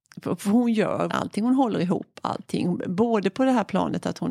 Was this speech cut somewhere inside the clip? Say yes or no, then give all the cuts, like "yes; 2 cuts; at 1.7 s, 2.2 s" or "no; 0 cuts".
yes; 1 cut; at 1.1 s